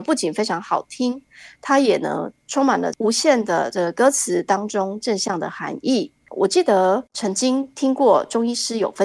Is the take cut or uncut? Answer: cut